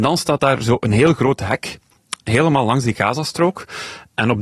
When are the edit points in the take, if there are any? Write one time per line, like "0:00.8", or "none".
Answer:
none